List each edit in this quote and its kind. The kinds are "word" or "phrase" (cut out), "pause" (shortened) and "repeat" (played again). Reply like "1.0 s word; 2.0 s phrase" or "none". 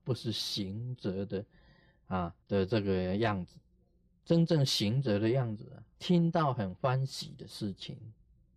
2.4 s pause

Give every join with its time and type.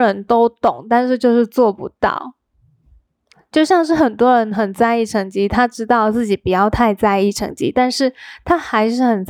none

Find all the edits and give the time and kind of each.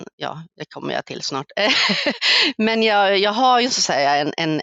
2.6 s word

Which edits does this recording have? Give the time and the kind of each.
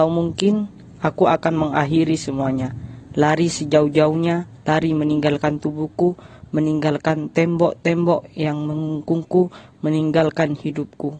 none

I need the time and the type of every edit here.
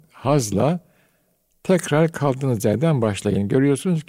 none

